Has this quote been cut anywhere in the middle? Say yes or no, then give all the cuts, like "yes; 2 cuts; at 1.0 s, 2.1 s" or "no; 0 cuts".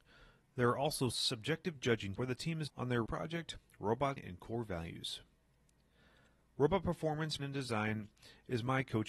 yes; 6 cuts; at 1.1 s, 2.1 s, 2.7 s, 3.1 s, 4.2 s, 7.4 s